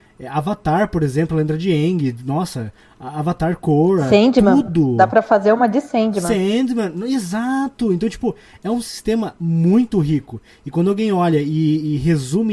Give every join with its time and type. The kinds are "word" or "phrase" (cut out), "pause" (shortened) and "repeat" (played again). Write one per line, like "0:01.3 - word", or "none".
none